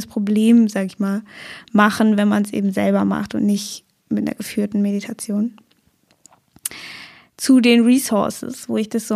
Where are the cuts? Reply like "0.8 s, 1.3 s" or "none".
none